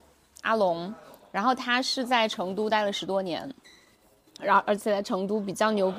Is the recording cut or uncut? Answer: uncut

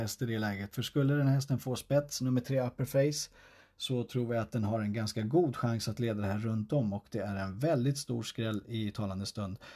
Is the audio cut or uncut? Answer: uncut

